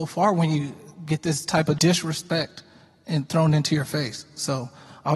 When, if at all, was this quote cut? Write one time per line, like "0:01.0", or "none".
0:01.8